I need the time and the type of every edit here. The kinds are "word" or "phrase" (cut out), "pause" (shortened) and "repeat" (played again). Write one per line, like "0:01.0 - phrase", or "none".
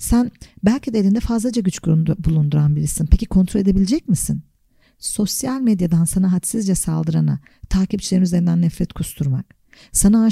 none